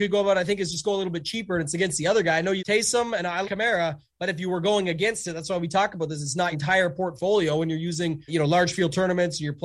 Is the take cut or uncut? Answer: cut